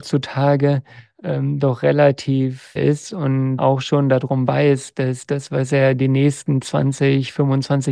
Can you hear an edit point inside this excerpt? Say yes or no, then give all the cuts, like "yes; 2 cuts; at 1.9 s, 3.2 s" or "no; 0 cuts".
yes; 2 cuts; at 2.8 s, 3.6 s